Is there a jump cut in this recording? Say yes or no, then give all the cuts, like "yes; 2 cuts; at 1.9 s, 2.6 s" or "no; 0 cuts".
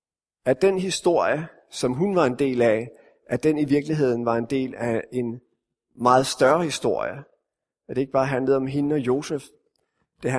no; 0 cuts